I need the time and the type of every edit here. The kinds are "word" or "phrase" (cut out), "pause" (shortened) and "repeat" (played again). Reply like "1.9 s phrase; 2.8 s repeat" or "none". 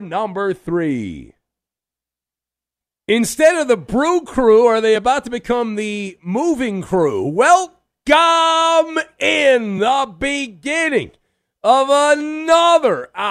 none